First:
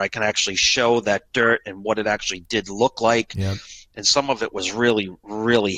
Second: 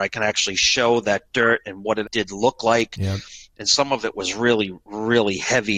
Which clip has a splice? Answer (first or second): second